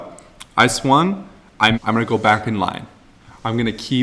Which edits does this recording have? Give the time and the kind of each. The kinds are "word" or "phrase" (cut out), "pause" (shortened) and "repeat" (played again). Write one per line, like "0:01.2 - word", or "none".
0:01.7 - word